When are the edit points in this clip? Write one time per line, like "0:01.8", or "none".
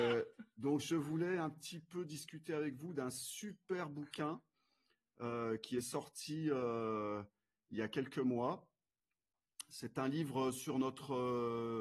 none